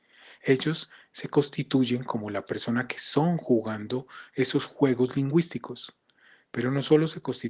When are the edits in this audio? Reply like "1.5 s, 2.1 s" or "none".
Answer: none